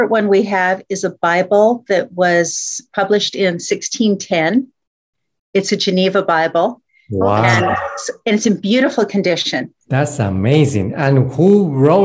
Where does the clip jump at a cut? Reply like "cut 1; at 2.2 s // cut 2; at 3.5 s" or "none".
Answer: cut 1; at 9.8 s